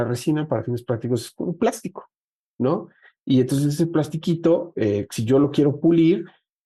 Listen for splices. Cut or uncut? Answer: uncut